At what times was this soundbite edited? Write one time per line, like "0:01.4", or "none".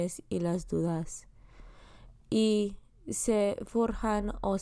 none